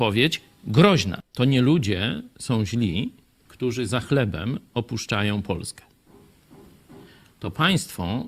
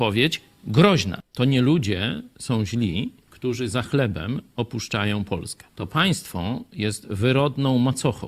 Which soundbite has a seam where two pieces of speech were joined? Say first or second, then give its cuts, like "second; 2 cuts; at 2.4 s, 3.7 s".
second; 2 cuts; at 3.2 s, 5.7 s